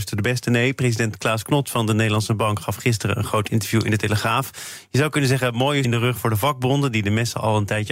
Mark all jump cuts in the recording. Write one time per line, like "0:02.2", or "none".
0:05.8